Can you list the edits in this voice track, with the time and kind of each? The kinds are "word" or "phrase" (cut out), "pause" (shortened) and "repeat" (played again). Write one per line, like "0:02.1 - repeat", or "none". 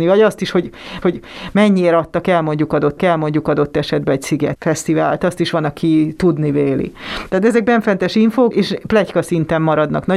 0:01.0 - repeat
0:03.0 - repeat
0:08.5 - word

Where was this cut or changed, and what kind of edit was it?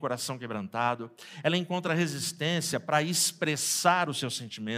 none

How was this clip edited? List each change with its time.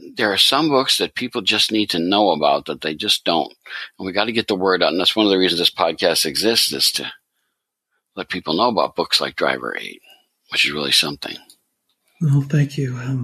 none

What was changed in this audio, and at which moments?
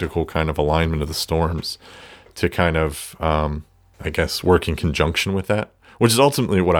none

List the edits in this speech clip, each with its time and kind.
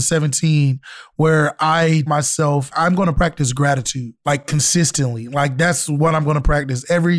0:02.1 - word
0:02.7 - word

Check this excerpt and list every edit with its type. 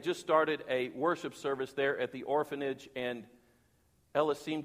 none

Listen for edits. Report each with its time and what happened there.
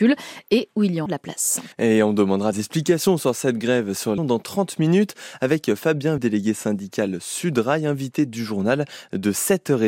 0:01.1 - word
0:01.7 - pause
0:02.5 - word
0:04.2 - phrase
0:06.2 - word

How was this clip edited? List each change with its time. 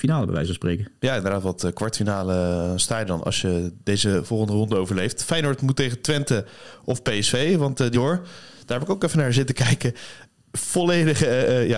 0:03.2 - word
0:07.9 - phrase

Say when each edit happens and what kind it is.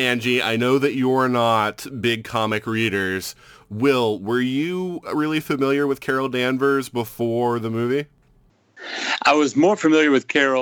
none

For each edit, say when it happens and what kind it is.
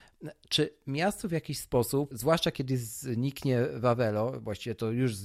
0:02.1 - word

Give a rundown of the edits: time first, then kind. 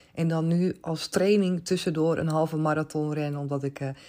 none

